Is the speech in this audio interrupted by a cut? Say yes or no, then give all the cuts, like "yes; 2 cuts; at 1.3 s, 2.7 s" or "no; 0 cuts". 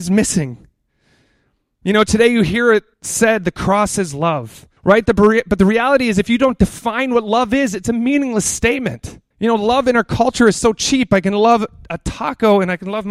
yes; 3 cuts; at 2.9 s, 4.8 s, 9.3 s